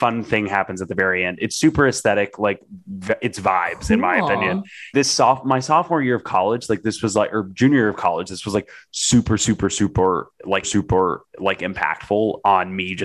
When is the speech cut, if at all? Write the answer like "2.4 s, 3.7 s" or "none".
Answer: 4.9 s, 10.6 s